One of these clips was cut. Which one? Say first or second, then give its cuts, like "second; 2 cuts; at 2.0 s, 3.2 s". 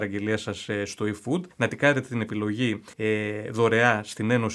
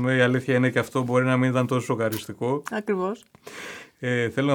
first; 2 cuts; at 1.5 s, 2.9 s